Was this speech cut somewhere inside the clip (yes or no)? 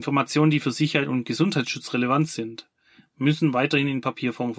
no